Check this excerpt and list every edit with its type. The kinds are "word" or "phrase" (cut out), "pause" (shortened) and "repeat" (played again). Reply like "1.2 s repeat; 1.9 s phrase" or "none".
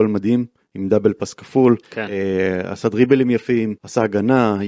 1.8 s pause; 3.8 s pause

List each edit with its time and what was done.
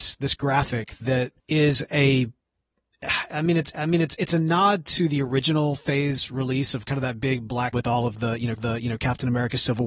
1.4 s pause; 3.7 s repeat; 7.7 s word; 8.6 s repeat

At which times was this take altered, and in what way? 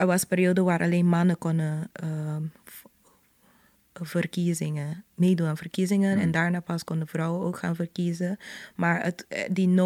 none

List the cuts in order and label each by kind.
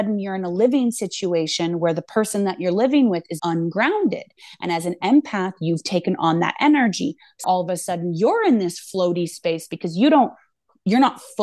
3.4 s word; 7.4 s word

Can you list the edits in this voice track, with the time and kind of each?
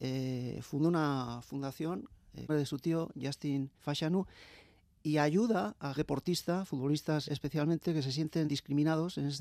2.5 s phrase; 3.8 s pause; 6.0 s word; 7.3 s word; 8.5 s word

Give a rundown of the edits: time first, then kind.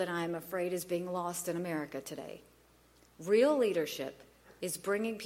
none

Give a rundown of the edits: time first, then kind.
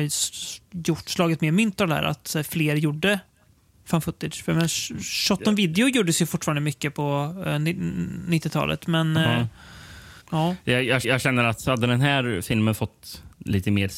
3.7 s word; 10.2 s pause; 11.0 s repeat

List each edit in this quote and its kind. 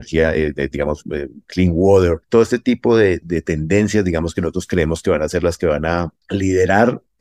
6.2 s pause

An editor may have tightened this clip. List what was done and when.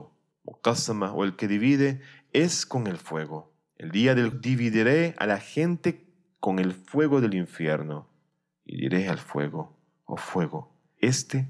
4.3 s word

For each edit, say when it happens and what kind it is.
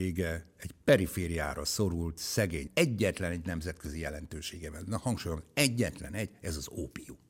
2.7 s phrase

